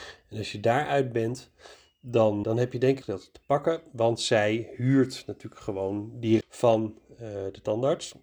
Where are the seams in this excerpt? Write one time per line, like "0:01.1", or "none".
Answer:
0:02.4
0:03.0
0:06.4